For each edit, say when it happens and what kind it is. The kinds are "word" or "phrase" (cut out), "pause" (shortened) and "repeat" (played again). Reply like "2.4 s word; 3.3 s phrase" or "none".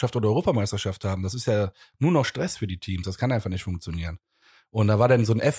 none